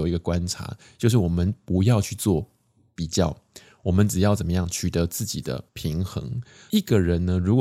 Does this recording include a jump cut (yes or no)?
yes